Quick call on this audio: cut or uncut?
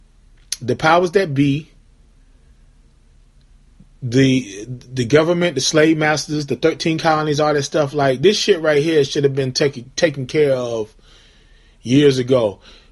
uncut